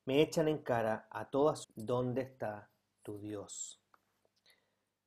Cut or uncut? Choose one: cut